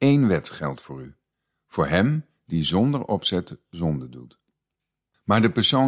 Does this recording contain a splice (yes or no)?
no